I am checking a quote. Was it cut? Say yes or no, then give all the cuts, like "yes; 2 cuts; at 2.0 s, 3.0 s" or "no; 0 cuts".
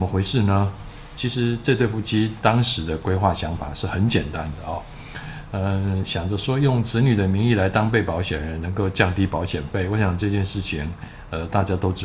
no; 0 cuts